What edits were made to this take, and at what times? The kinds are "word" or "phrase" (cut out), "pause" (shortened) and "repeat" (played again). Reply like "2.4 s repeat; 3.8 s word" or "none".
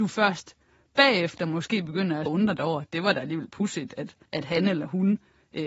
2.3 s word; 4.3 s pause